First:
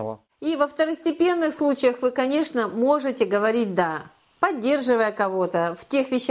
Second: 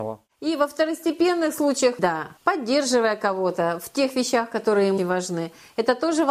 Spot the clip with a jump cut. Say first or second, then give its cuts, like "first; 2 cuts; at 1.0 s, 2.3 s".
second; 3 cuts; at 2.0 s, 2.4 s, 5.0 s